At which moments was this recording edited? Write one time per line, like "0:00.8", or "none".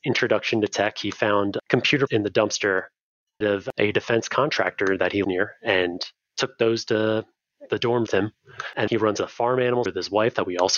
0:02.1
0:03.4
0:05.2
0:08.1
0:08.9
0:09.9